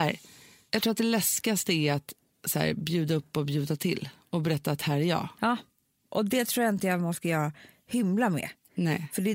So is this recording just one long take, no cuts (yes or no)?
yes